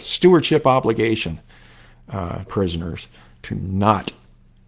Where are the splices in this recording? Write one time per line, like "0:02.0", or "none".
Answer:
0:02.5